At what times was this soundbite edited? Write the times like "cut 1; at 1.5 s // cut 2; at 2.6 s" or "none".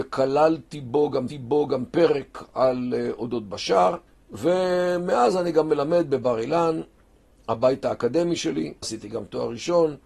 cut 1; at 1.3 s // cut 2; at 4.1 s // cut 3; at 8.8 s